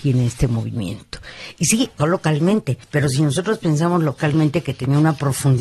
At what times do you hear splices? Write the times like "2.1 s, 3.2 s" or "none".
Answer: 2.0 s, 2.8 s